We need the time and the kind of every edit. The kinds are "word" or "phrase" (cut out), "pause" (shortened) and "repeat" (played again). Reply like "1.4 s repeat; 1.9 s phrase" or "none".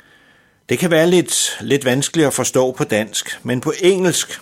none